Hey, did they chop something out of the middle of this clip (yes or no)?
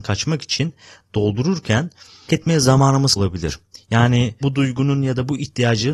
yes